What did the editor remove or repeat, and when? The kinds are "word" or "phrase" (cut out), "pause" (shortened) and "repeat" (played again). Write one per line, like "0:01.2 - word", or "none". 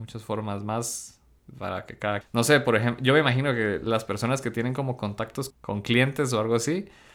0:02.2 - word
0:05.5 - word